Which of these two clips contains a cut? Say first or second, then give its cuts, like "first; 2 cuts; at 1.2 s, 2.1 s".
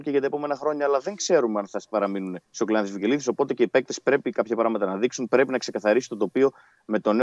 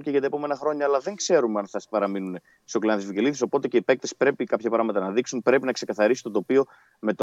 first; 1 cut; at 2.4 s